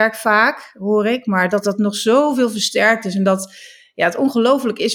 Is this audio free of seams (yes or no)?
yes